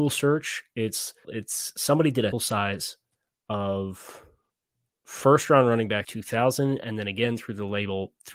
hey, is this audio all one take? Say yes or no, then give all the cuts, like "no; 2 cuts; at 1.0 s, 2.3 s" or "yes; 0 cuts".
no; 3 cuts; at 1.2 s, 2.3 s, 6.0 s